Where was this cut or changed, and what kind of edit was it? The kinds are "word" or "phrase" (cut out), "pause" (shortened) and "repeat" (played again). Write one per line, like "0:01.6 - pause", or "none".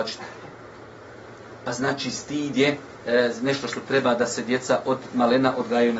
none

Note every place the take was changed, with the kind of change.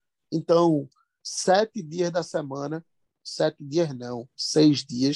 none

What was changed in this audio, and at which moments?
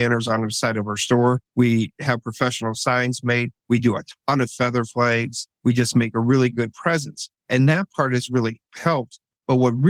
0:01.5 - pause
0:03.6 - pause
0:05.5 - pause
0:07.4 - pause
0:08.7 - pause

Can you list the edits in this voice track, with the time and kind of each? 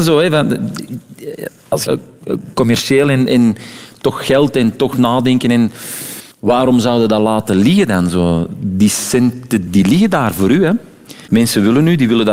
0:01.9 - phrase
0:06.3 - pause
0:09.7 - word

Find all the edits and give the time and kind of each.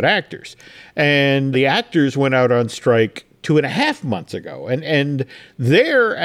0:01.5 - word

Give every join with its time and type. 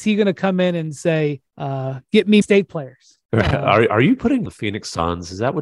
0:01.5 - pause
0:02.4 - word
0:03.2 - pause
0:03.9 - word
0:04.5 - phrase

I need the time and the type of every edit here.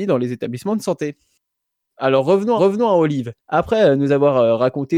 0:02.6 - repeat
0:03.4 - pause

